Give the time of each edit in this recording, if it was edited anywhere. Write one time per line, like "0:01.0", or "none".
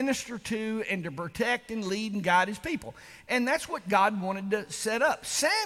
none